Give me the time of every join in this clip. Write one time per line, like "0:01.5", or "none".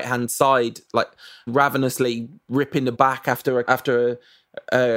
0:01.5
0:02.9
0:03.6